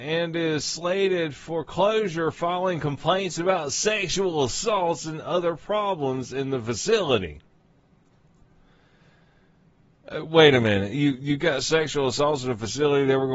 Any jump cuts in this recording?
no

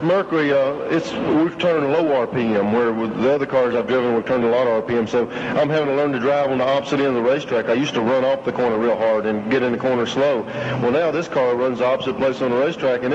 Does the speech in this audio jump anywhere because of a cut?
no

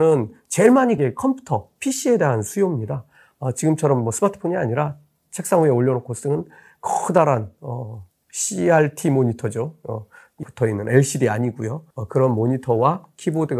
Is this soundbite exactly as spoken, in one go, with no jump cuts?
no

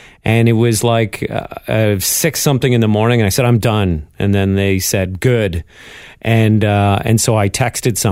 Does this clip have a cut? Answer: no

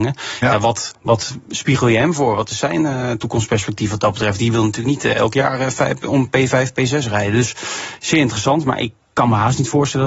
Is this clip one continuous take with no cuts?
no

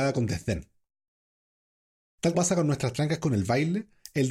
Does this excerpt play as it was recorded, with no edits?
no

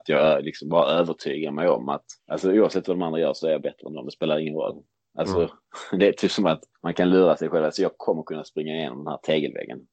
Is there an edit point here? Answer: yes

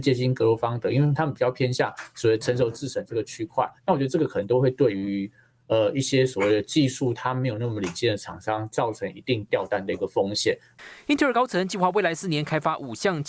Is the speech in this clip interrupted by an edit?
yes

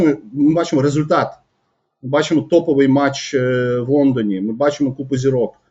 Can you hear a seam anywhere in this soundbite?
no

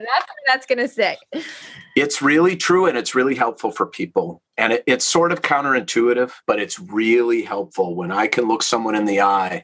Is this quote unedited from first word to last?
no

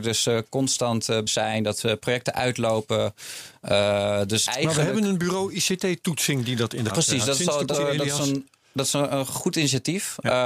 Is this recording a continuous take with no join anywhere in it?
no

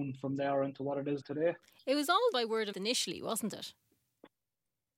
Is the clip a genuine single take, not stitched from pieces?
no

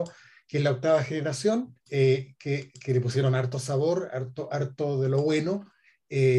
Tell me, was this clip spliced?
yes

